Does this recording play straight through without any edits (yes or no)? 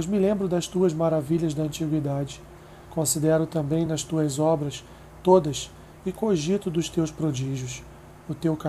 yes